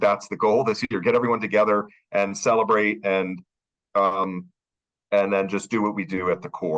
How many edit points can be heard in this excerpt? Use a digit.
0